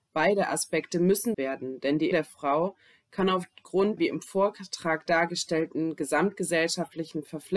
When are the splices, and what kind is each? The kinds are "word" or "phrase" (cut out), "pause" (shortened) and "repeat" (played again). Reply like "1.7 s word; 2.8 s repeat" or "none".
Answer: 1.3 s word; 2.1 s word; 4.0 s word